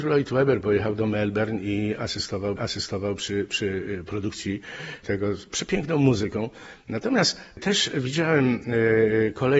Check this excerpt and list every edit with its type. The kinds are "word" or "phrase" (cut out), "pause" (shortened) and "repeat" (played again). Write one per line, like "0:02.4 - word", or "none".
0:02.6 - repeat